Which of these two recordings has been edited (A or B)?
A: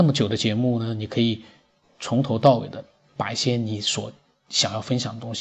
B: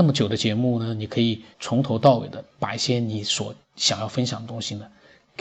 B